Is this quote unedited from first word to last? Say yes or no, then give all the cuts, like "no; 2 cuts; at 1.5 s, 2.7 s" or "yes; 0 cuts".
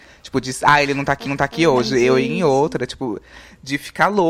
no; 1 cut; at 1.3 s